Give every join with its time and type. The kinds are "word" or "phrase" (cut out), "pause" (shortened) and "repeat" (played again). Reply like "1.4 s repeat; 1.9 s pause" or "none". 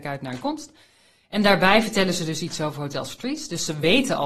none